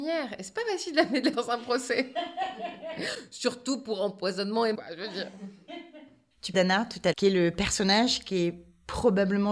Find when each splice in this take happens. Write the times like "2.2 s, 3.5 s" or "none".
1.3 s, 4.7 s, 6.5 s, 7.1 s